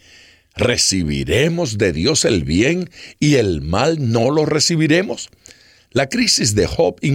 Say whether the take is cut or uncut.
uncut